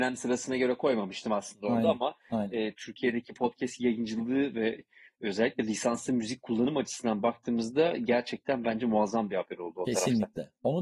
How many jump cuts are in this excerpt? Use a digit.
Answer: 0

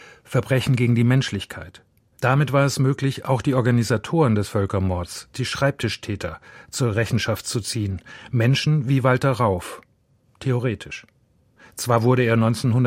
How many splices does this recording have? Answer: 0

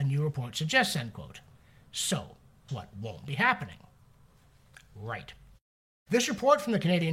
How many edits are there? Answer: 1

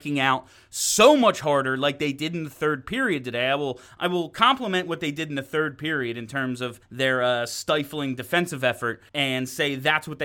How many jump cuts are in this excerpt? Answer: 2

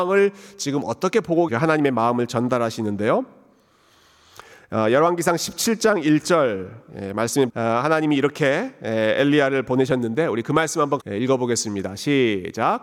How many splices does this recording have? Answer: 3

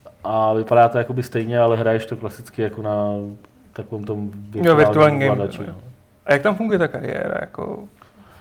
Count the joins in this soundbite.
0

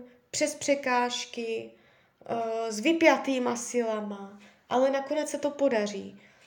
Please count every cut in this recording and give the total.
0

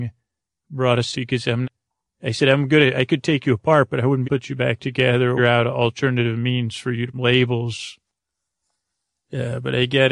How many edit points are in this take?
5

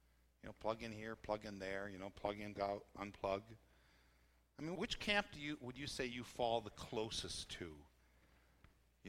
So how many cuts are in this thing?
2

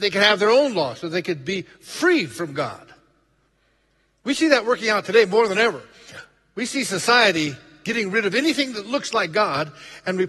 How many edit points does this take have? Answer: 0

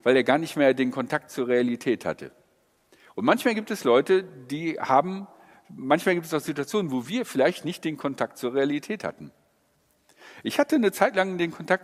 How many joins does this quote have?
0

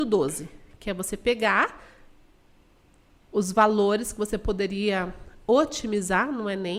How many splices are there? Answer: 0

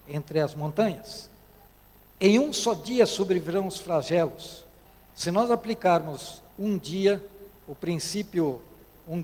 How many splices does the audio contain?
4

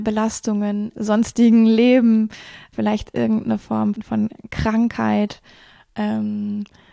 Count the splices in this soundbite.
3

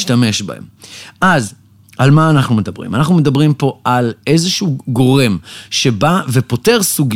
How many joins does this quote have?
0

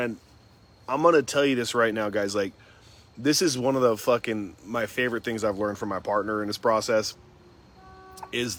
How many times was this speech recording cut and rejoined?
0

